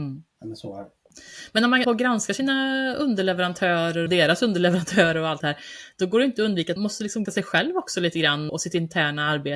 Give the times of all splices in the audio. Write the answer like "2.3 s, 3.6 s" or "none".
1.8 s, 4.1 s, 5.4 s, 6.8 s, 7.3 s, 8.5 s